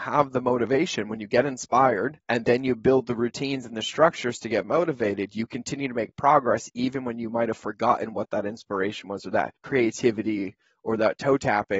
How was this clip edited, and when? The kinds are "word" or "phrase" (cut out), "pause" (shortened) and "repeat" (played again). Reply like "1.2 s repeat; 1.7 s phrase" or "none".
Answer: 2.2 s pause; 9.6 s pause